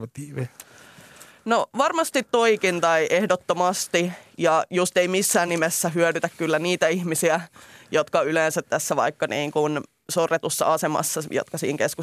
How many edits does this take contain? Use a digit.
0